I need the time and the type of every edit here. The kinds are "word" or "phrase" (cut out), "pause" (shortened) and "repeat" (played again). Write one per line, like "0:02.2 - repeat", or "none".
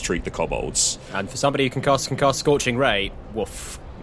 0:02.1 - repeat

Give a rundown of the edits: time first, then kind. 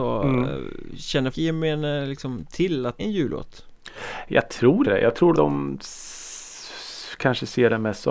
0:01.3 - word
0:03.0 - word
0:04.8 - word
0:05.3 - word

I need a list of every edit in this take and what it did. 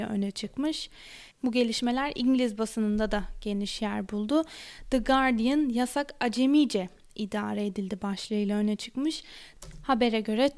none

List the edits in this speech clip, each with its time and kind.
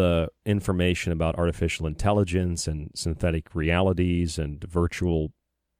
none

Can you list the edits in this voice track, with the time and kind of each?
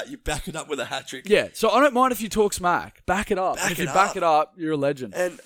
0:03.0 - word

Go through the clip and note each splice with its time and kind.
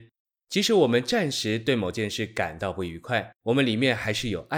0:03.4 - pause

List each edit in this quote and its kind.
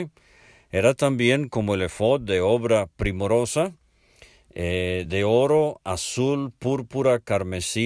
none

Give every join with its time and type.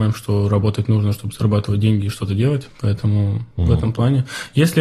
none

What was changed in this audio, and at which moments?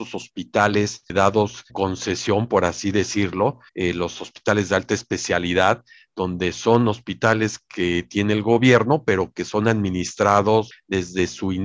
0:01.7 - word
0:03.7 - pause

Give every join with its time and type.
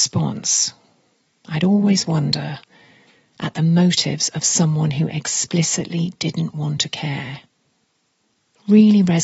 none

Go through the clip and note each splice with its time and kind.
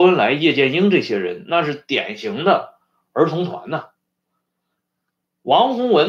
none

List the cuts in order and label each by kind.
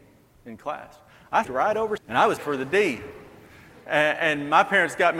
0:01.4 - word
0:02.0 - word
0:02.4 - word

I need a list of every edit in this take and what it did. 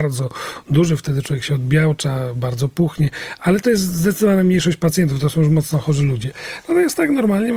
none

